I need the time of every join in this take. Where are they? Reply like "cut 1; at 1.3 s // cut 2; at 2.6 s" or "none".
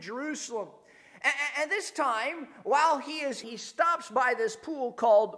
cut 1; at 3.4 s